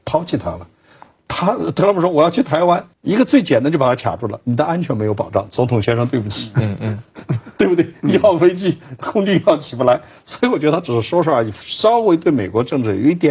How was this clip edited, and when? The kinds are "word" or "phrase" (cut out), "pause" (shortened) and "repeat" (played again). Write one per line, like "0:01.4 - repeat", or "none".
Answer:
0:02.9 - pause